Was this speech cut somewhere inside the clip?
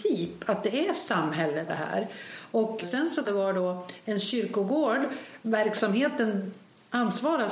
yes; 3 cuts; at 1.7 s, 2.8 s, 3.2 s

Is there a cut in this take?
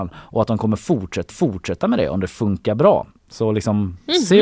yes; 1 cut; at 1.3 s

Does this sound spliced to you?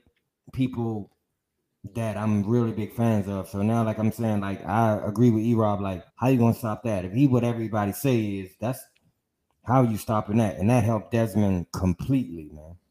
yes; 1 cut; at 6.1 s

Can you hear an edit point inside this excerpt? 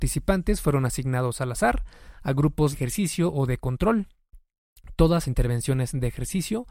yes; 2 cuts; at 2.7 s, 5.2 s

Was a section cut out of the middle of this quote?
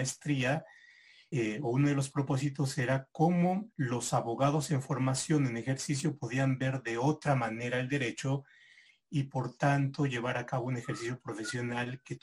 yes; 2 cuts; at 1.3 s, 3.7 s

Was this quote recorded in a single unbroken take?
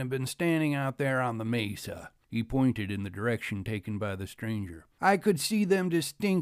no; 1 cut; at 2.2 s

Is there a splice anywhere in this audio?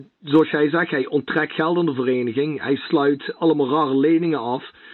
no; 0 cuts

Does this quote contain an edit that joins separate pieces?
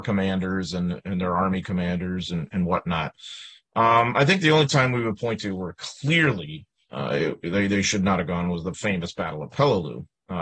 no; 0 cuts

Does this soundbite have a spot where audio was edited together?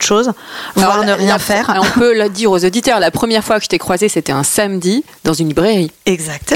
no; 0 cuts

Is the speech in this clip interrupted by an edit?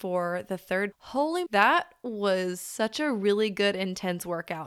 yes; 2 cuts; at 0.9 s, 1.5 s

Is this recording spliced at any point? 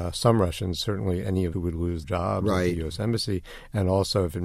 yes; 3 cuts; at 1.2 s, 1.5 s, 2.0 s

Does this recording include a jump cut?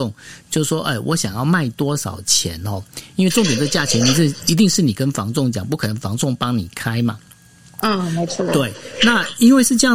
no; 0 cuts

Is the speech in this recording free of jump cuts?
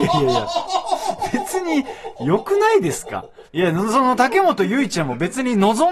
no; 1 cut; at 3.5 s

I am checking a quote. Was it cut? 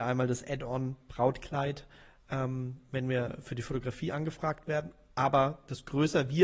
no; 0 cuts

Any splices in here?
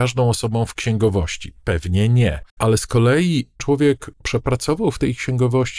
yes; 3 cuts; at 2.5 s, 3.6 s, 4.1 s

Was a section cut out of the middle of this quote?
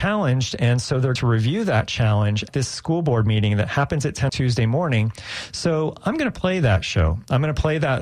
yes; 3 cuts; at 1.2 s, 2.5 s, 4.3 s

